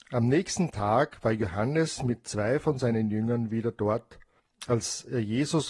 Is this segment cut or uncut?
uncut